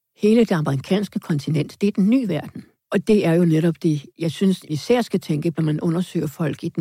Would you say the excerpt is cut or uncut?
cut